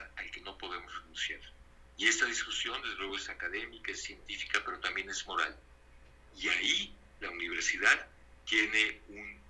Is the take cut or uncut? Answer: uncut